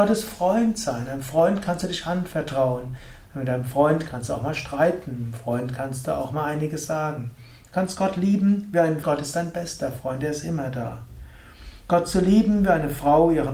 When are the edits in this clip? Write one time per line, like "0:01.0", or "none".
0:09.0